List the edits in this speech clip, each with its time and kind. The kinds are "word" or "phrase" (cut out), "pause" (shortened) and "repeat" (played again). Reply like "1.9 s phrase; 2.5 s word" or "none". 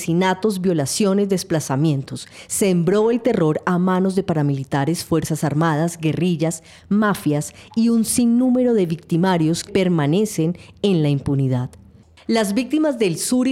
9.7 s word